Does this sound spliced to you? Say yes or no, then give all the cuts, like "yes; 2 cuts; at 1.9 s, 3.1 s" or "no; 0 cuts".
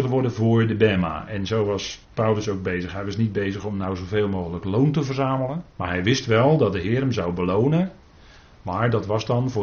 yes; 2 cuts; at 2.0 s, 5.7 s